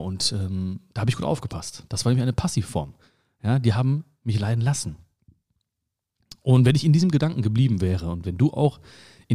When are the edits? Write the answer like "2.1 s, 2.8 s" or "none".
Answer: none